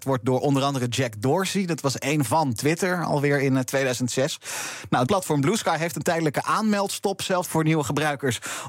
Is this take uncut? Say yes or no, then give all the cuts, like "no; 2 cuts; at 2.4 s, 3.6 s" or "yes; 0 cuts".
no; 3 cuts; at 2.3 s, 5.1 s, 7.4 s